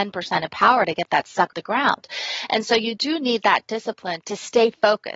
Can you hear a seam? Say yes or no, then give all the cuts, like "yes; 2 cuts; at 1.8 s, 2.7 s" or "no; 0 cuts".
yes; 2 cuts; at 1.5 s, 4.2 s